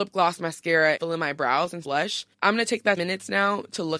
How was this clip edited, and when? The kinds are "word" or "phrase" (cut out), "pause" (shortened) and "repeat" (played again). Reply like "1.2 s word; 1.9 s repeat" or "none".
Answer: 1.0 s word; 1.8 s word; 2.3 s pause; 3.0 s word